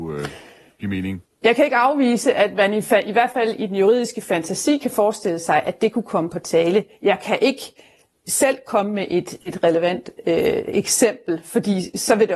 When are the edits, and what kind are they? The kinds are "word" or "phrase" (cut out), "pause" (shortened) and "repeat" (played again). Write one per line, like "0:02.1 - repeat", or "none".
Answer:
none